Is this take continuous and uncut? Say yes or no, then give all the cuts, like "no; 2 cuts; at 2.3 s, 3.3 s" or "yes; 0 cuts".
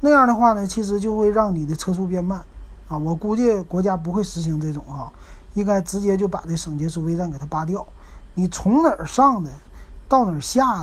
yes; 0 cuts